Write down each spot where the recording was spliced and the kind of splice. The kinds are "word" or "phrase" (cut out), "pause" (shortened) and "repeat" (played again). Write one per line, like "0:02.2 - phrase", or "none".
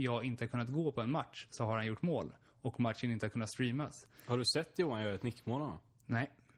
none